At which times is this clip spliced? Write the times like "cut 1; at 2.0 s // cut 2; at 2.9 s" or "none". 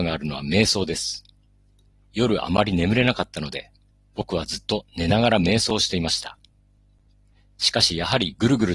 none